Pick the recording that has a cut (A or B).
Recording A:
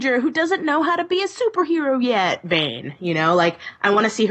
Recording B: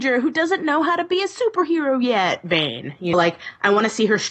B